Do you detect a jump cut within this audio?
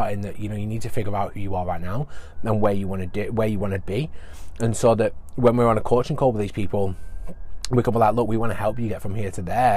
no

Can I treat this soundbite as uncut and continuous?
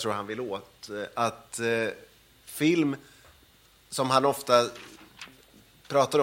yes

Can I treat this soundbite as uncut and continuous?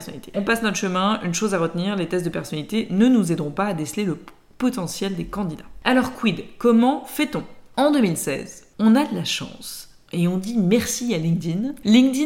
yes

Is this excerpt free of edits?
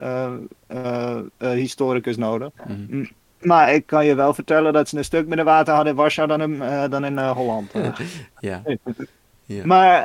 no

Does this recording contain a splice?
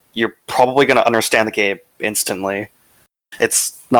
no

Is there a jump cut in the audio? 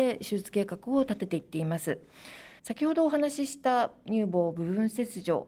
yes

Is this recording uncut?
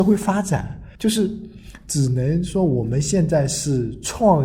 no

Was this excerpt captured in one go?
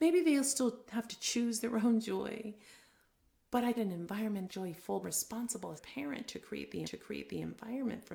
no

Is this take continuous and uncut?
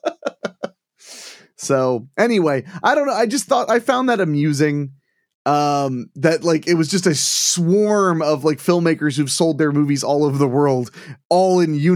yes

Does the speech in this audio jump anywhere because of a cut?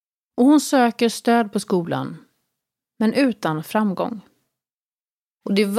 no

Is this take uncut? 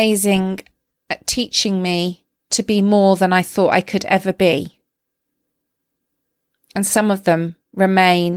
yes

